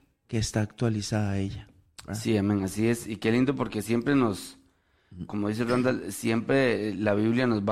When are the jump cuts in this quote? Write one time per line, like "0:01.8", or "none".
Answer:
0:05.3